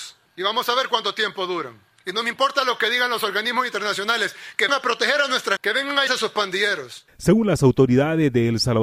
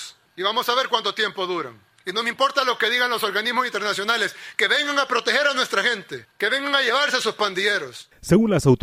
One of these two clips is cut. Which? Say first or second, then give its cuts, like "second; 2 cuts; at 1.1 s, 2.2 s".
first; 3 cuts; at 4.7 s, 5.6 s, 6.1 s